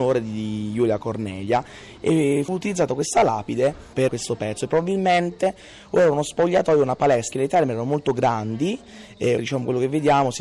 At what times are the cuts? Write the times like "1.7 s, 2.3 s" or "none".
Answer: 2.5 s, 4.1 s, 7.3 s, 9.4 s